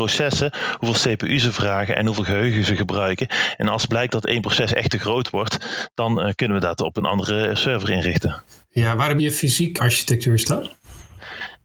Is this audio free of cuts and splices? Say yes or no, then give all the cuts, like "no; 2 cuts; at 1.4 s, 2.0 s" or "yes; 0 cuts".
no; 2 cuts; at 9.2 s, 9.8 s